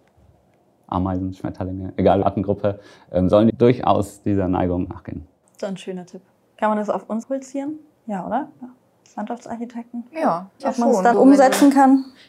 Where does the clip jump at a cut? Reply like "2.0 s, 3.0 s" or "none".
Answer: 2.2 s, 3.5 s, 4.9 s, 7.2 s, 10.6 s, 11.1 s